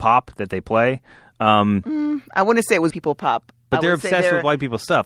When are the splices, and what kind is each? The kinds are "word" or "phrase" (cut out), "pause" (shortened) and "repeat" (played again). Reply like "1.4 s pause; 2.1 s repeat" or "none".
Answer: 2.9 s word